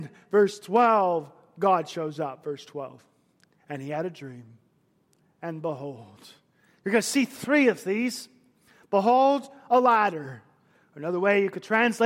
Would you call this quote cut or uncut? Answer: uncut